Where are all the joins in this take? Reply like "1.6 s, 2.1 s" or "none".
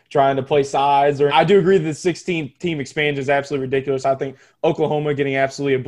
1.3 s